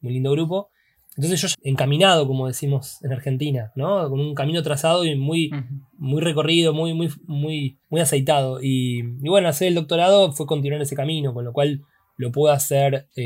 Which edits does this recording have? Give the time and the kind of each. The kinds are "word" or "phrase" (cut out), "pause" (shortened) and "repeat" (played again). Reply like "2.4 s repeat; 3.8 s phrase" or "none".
1.5 s phrase; 7.8 s pause